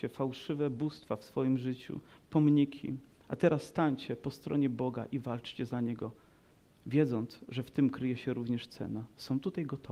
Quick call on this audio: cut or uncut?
uncut